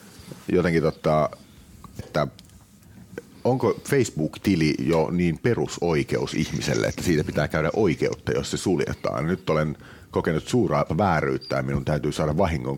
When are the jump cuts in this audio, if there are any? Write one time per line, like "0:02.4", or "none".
0:02.0
0:10.9